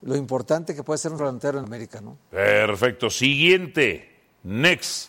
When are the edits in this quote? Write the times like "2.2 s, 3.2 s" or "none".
1.2 s, 1.6 s, 2.2 s